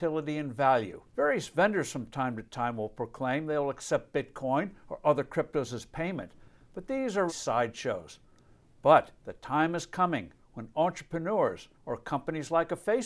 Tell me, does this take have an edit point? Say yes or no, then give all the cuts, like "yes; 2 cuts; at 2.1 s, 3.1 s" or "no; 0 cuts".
yes; 4 cuts; at 1.1 s, 7.3 s, 9.2 s, 11.7 s